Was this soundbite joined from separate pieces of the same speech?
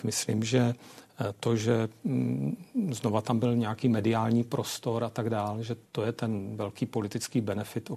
yes; 1 cut; at 5.9 s

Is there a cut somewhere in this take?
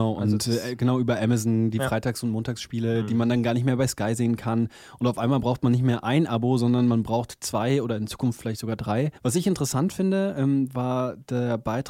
yes; 1 cut; at 9.2 s

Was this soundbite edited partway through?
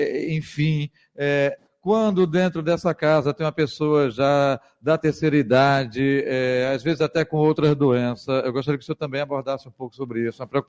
no; 0 cuts

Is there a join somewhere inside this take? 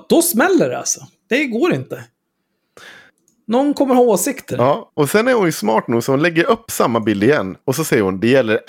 no; 0 cuts

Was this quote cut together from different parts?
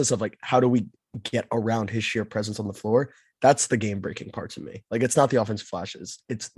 no; 0 cuts

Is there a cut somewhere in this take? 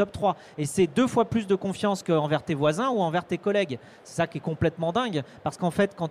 no; 0 cuts

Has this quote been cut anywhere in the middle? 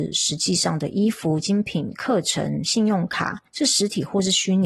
yes; 1 cut; at 3.5 s

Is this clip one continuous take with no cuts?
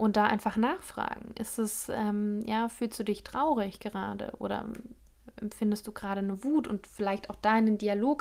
yes; 0 cuts

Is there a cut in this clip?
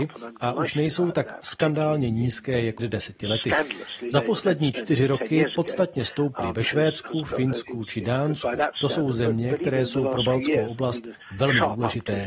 yes; 1 cut; at 2.8 s

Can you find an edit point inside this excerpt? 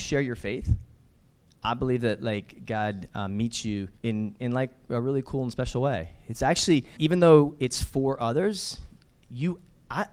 yes; 2 cuts; at 4.0 s, 7.0 s

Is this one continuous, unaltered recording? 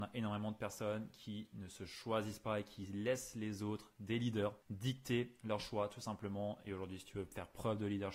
no; 1 cut; at 4.6 s

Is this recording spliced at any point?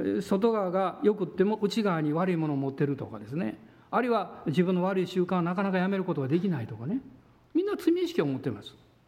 no; 0 cuts

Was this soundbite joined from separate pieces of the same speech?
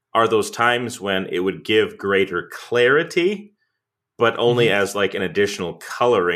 no; 0 cuts

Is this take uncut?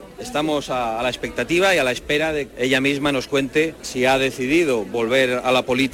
no; 1 cut; at 2.5 s

